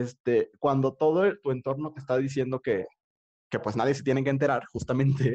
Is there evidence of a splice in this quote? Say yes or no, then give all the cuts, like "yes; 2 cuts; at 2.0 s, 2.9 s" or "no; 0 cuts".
no; 0 cuts